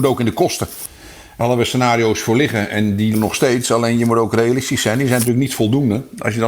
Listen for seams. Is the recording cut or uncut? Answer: cut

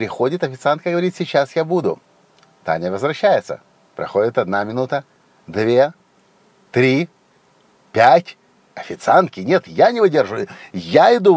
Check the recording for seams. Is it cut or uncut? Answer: uncut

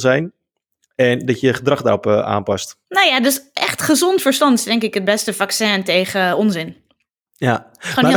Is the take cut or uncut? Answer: cut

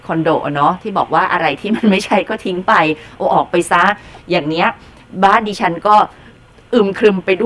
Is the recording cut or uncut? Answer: uncut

